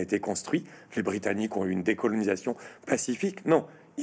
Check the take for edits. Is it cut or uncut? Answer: uncut